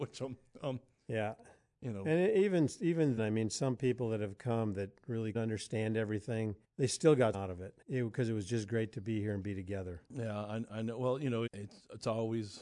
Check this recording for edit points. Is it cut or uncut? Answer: cut